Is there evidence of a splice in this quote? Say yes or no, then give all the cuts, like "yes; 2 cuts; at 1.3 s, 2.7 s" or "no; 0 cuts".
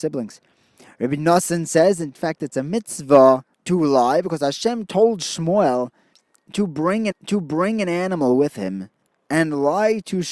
yes; 3 cuts; at 3.5 s, 7.1 s, 9.1 s